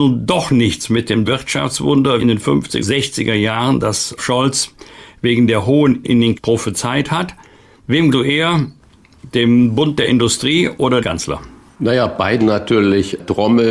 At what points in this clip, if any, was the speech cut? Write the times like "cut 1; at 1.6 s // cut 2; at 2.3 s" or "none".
cut 1; at 1.3 s // cut 2; at 2.2 s // cut 3; at 2.8 s // cut 4; at 4.2 s // cut 5; at 6.0 s // cut 6; at 6.4 s // cut 7; at 8.1 s // cut 8; at 11.0 s // cut 9; at 12.4 s